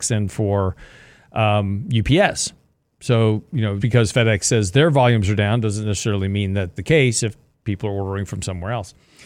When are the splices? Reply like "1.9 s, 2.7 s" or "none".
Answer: 3.8 s, 6.8 s